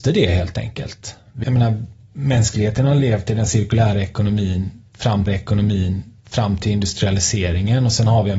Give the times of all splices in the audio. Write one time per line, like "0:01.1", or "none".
0:01.4
0:02.0
0:05.3